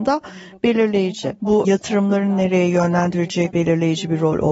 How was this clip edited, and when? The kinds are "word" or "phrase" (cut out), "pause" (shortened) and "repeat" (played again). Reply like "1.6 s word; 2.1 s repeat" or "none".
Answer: 1.6 s word; 3.5 s word